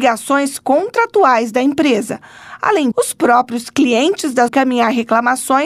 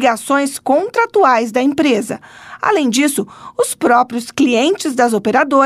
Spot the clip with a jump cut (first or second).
first